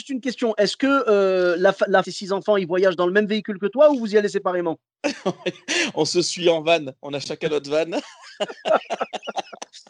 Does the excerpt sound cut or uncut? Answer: cut